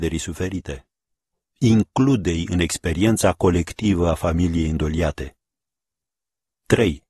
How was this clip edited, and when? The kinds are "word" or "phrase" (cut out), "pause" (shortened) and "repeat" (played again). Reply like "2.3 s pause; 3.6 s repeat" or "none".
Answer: none